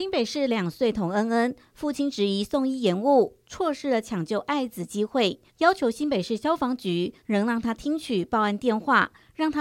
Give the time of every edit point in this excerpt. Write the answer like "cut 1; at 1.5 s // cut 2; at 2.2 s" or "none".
cut 1; at 5.5 s // cut 2; at 7.2 s